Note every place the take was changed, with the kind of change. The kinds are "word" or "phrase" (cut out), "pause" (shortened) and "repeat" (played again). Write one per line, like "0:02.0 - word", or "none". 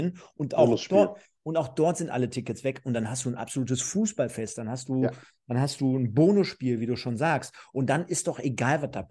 none